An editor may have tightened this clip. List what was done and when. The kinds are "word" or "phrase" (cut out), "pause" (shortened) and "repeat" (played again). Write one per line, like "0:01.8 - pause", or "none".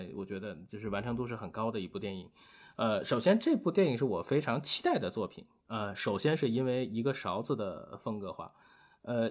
none